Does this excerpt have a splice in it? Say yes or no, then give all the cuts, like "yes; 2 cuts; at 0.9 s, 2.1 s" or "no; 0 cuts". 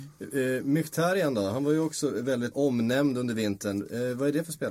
yes; 1 cut; at 2.5 s